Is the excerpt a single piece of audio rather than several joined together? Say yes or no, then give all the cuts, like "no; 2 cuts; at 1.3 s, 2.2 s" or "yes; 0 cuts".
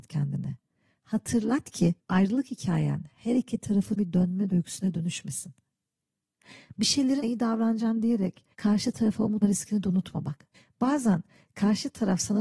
no; 7 cuts; at 2.0 s, 4.0 s, 4.5 s, 7.2 s, 8.5 s, 9.4 s, 10.5 s